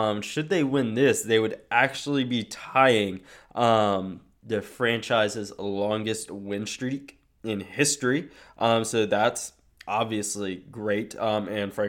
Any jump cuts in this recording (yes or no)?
no